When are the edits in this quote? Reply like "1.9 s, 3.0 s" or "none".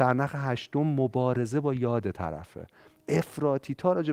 none